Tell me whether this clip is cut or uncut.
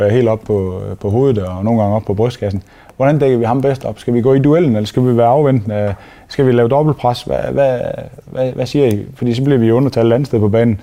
uncut